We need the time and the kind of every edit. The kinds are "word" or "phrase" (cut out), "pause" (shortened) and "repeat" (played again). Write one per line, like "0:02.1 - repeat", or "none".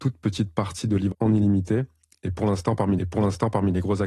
0:01.1 - word
0:03.0 - repeat